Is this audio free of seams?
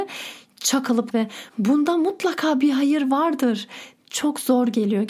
no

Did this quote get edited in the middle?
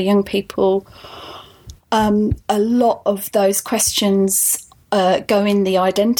no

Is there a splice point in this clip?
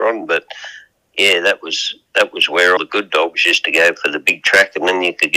yes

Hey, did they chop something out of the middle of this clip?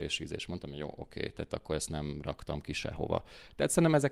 no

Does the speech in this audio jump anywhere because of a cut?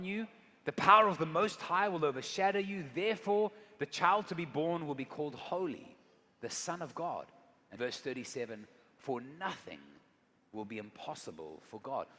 yes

